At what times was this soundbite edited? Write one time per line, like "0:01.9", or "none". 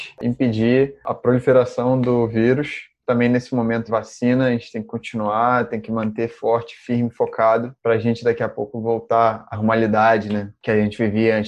0:03.9
0:09.5